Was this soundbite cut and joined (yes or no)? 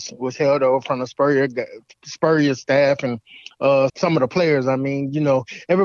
yes